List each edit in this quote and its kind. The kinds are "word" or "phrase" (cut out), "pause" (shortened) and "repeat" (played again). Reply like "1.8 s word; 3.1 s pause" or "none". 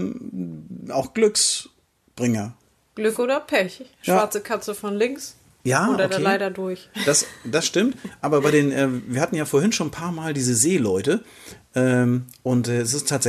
none